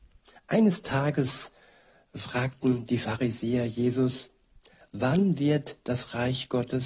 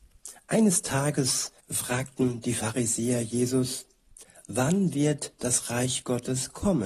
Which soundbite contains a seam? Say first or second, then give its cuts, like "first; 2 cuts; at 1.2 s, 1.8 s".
second; 1 cut; at 1.6 s